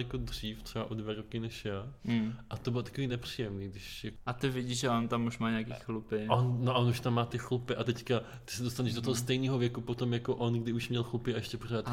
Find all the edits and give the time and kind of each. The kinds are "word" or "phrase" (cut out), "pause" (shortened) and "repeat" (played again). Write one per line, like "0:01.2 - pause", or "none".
none